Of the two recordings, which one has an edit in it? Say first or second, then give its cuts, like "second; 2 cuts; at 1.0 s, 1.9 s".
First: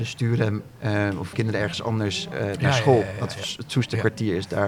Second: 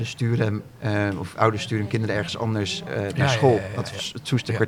first; 1 cut; at 1.3 s